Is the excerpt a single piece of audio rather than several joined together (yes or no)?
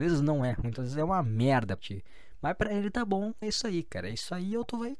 no